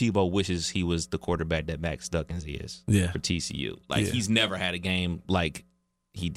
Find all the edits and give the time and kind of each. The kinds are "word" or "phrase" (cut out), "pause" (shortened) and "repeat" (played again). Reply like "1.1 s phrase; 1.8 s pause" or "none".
none

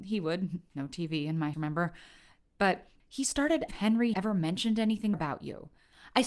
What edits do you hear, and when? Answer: 1.5 s word; 3.0 s word; 3.7 s phrase; 4.1 s word; 5.1 s word

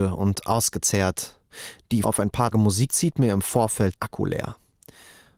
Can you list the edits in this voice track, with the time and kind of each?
2.0 s word; 2.5 s word; 2.9 s word; 4.0 s word

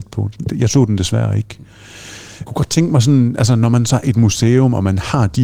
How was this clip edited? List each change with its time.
2.5 s word; 4.0 s word

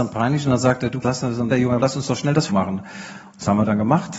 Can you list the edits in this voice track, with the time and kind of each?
1.0 s word; 1.5 s word; 1.8 s word; 2.5 s word

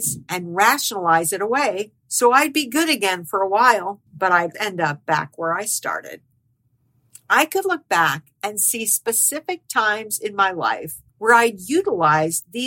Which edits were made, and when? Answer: 2.0 s pause; 4.1 s pause; 4.5 s word; 11.1 s pause

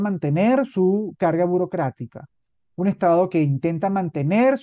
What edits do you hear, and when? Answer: none

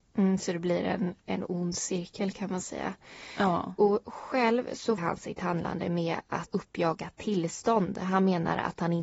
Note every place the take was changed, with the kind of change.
5.0 s word; 6.5 s phrase

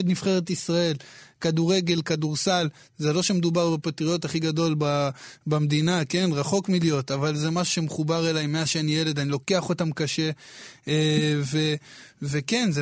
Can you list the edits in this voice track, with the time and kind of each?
none

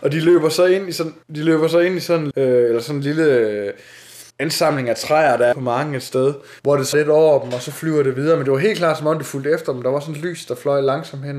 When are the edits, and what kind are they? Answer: 1.2 s pause; 2.3 s word; 4.3 s pause; 5.5 s word; 6.6 s pause; 6.9 s word

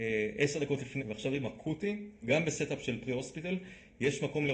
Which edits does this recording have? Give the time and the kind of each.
1.0 s word; 1.4 s word; 2.2 s word

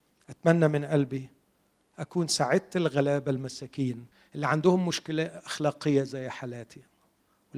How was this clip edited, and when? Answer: 4.1 s pause

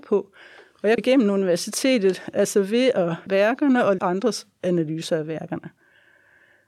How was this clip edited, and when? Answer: 1.0 s word; 3.3 s word; 4.0 s word

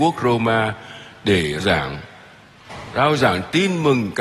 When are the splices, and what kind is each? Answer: 1.6 s word

